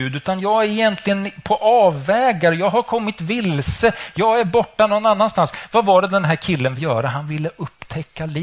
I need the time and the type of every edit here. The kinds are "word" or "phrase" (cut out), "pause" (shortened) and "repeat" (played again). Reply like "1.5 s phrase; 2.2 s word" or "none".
6.8 s word